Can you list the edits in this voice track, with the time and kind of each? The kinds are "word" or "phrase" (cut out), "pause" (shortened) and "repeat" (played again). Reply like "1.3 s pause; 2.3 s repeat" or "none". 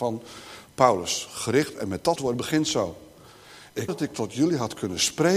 2.2 s word; 3.9 s word